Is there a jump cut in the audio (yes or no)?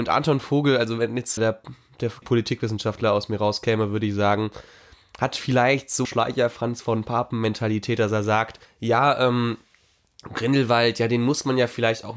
yes